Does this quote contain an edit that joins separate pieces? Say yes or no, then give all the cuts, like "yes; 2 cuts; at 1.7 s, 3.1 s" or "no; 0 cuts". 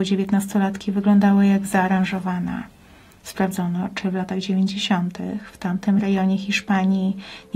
no; 0 cuts